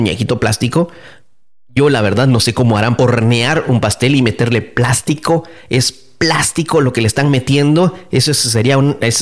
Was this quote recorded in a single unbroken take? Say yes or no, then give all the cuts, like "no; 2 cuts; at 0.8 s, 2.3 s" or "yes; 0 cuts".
no; 1 cut; at 3.0 s